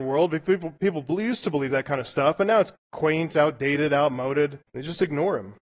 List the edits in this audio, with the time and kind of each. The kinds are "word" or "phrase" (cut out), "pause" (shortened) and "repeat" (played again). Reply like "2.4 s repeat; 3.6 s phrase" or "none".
4.7 s pause